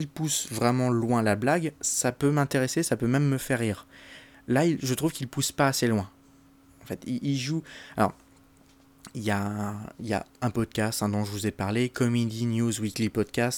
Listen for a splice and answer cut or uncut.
uncut